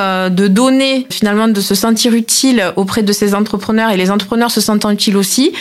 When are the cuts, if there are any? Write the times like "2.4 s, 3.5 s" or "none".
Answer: 1.1 s